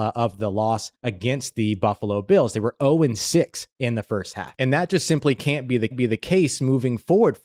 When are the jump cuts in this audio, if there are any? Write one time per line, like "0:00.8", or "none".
0:00.9
0:03.7
0:05.9